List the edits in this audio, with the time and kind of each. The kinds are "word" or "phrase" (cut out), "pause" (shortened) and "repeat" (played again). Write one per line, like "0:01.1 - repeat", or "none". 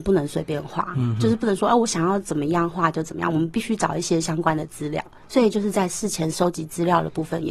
none